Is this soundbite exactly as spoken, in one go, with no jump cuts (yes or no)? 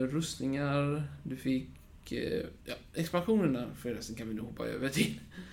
no